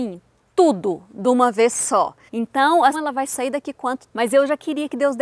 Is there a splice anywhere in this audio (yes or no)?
yes